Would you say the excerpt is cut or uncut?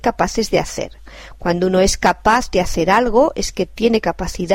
uncut